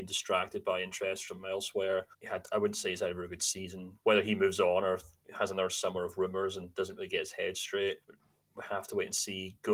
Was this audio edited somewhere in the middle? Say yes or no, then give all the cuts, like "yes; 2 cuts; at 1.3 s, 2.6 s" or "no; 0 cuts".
yes; 2 cuts; at 2.1 s, 8.0 s